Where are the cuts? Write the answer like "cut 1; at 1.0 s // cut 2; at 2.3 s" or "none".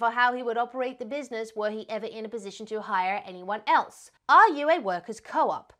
cut 1; at 4.2 s

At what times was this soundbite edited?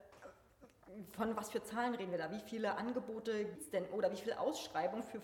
cut 1; at 3.6 s

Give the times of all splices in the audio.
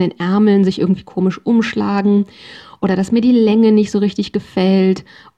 none

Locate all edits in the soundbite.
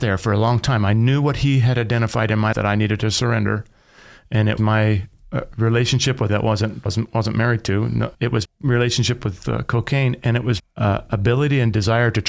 cut 1; at 2.5 s // cut 2; at 4.6 s // cut 3; at 6.3 s // cut 4; at 6.9 s // cut 5; at 8.1 s // cut 6; at 8.4 s // cut 7; at 9.4 s // cut 8; at 10.6 s

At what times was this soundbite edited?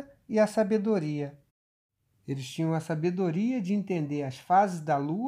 none

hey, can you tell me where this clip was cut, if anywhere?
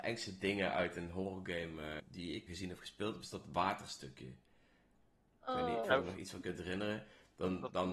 cut 1; at 2.0 s // cut 2; at 2.5 s // cut 3; at 5.8 s

